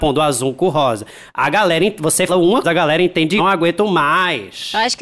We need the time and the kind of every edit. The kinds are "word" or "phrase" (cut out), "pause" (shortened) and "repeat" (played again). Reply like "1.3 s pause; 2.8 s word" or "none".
2.3 s word; 2.6 s word; 3.4 s phrase